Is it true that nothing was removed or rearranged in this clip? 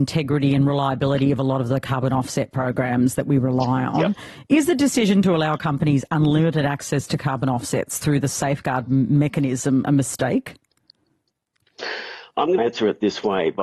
no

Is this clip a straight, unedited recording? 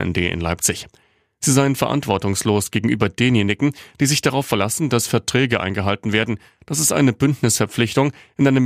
yes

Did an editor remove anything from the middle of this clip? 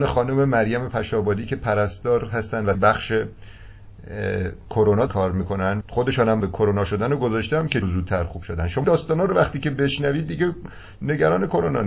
yes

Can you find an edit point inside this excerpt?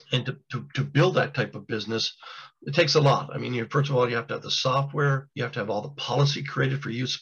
yes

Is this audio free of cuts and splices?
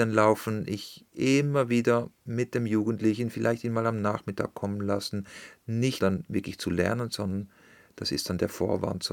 no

